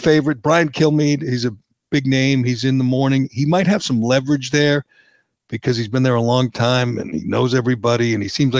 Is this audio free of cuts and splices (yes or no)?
yes